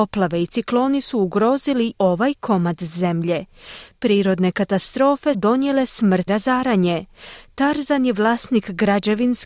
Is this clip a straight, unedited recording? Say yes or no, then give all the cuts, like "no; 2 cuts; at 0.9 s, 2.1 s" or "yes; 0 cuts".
no; 3 cuts; at 2.0 s, 5.3 s, 6.3 s